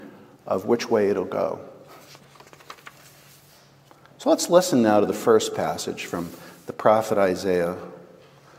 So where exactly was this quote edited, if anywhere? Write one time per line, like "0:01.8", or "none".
none